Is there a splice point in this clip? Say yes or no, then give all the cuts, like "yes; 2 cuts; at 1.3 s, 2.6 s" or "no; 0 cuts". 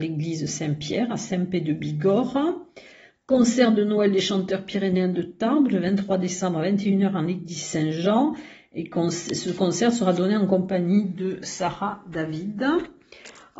no; 0 cuts